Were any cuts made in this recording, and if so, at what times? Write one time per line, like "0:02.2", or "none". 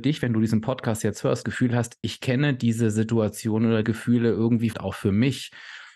0:01.4
0:03.8
0:04.7